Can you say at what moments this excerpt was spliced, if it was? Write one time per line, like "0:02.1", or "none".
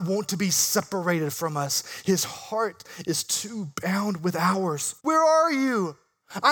0:05.0